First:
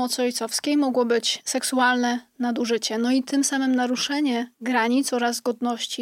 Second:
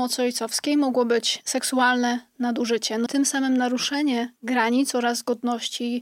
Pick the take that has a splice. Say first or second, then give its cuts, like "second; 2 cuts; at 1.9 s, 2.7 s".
second; 1 cut; at 3.1 s